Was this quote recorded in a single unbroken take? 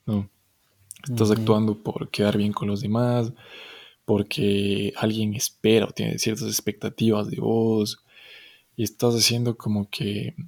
yes; 0 cuts

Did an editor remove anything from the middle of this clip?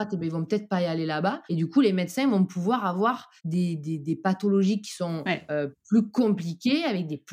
yes; 2 cuts; at 1.5 s, 3.4 s

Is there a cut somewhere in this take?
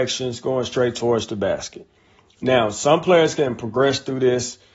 no; 0 cuts

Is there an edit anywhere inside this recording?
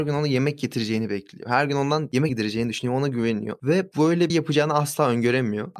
yes; 2 cuts; at 2.3 s, 4.3 s

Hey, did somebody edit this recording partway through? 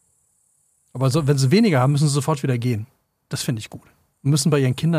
no; 0 cuts

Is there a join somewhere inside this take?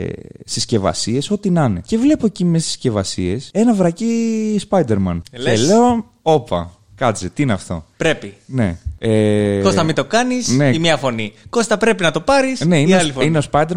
no; 0 cuts

